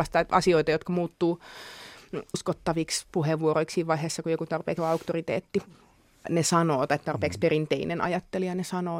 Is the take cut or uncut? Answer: cut